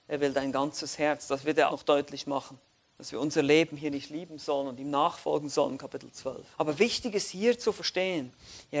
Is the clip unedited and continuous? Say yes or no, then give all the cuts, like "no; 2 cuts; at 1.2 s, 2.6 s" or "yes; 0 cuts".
no; 3 cuts; at 1.7 s, 2.8 s, 6.5 s